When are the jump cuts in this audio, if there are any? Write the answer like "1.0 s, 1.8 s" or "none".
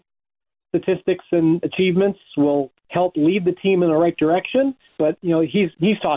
4.9 s